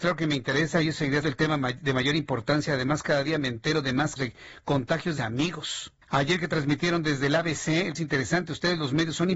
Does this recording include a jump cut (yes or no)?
yes